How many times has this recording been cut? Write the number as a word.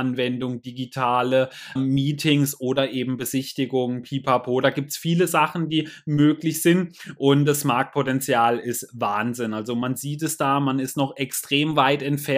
one